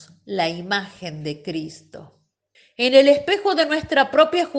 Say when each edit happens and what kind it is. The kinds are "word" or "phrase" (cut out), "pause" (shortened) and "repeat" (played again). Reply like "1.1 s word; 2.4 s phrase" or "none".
2.5 s pause